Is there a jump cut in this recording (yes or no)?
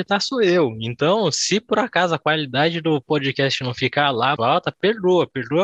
yes